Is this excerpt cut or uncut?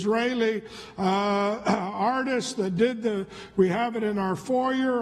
uncut